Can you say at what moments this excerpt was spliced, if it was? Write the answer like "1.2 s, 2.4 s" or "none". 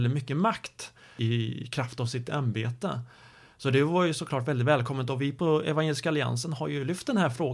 none